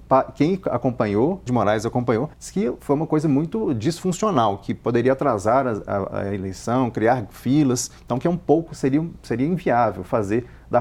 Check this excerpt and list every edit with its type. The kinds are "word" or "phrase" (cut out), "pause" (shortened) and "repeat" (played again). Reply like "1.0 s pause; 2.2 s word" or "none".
1.5 s phrase; 2.3 s pause; 8.0 s pause